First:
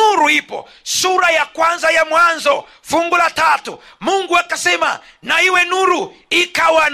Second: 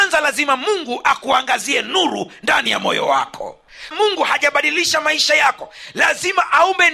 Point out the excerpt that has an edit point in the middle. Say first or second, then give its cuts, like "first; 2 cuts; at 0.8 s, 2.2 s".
second; 1 cut; at 3.9 s